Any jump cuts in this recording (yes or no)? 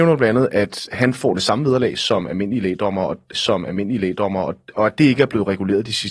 yes